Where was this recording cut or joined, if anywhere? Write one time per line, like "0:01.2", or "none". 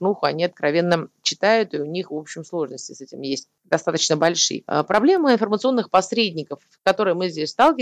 0:03.6